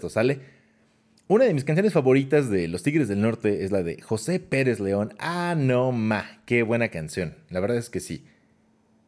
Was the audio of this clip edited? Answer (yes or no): no